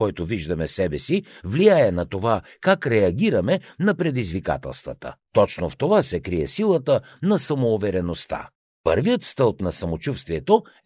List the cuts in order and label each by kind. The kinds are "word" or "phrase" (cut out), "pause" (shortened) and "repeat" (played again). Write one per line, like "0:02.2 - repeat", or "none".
0:05.2 - pause
0:08.6 - pause